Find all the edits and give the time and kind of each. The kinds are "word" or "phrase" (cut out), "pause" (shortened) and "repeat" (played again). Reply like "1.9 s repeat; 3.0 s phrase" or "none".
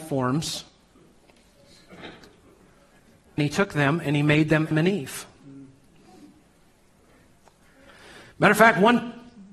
3.4 s word; 4.7 s word